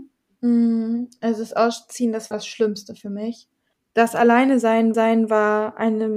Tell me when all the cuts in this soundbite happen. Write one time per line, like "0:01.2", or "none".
0:02.3
0:03.7
0:04.9